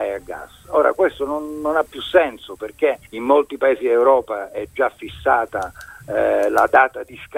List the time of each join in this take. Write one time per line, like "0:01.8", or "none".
0:03.1